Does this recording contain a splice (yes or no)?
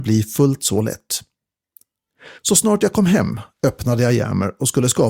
yes